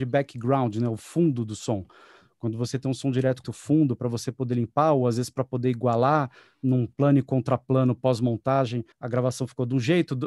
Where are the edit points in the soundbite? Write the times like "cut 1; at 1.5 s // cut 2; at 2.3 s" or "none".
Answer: cut 1; at 3.4 s // cut 2; at 8.9 s